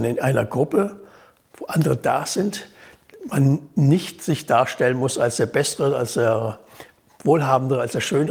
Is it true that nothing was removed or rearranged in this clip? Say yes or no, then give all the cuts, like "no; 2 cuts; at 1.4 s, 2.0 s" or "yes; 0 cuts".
yes; 0 cuts